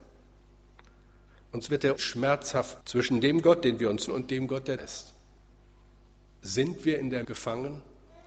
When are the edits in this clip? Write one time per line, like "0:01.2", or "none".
0:02.0
0:02.8
0:04.1
0:04.8
0:07.2